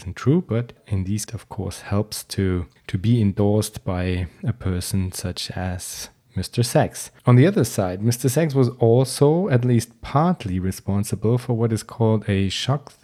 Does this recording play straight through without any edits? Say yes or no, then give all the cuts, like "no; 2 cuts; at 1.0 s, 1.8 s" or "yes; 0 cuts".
no; 3 cuts; at 1.3 s, 2.8 s, 7.2 s